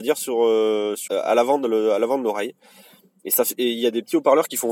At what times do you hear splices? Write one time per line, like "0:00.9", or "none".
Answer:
0:01.1